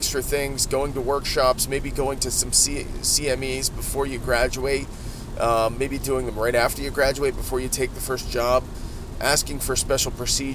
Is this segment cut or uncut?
uncut